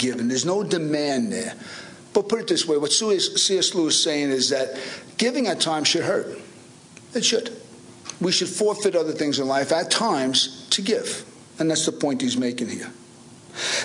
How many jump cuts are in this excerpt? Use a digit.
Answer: 0